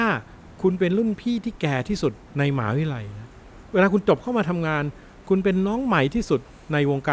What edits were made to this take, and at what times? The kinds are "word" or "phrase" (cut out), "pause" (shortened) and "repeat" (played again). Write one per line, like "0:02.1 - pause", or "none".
0:02.2 - pause